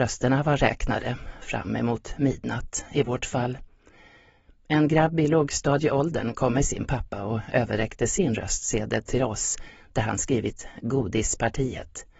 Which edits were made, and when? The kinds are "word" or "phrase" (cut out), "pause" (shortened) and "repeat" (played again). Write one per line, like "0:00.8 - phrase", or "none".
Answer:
none